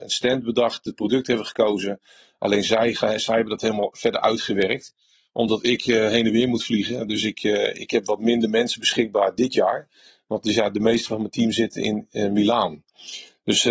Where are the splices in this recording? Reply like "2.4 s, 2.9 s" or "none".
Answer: none